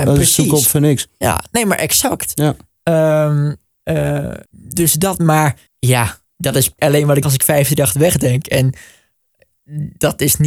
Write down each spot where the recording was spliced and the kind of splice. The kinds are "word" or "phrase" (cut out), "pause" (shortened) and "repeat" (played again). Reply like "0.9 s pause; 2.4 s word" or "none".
1.2 s pause; 4.5 s pause; 5.7 s pause; 6.8 s word; 7.2 s word